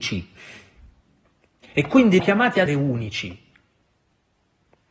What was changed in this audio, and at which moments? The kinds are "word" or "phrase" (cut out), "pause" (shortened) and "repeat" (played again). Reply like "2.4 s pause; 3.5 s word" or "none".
2.2 s phrase; 2.7 s word